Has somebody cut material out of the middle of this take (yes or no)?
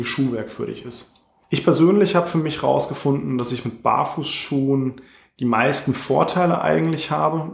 yes